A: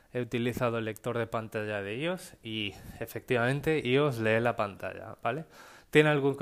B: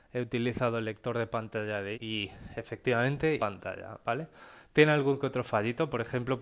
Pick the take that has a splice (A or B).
B